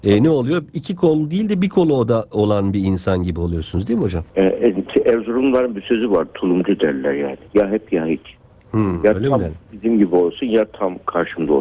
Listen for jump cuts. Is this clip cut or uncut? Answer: cut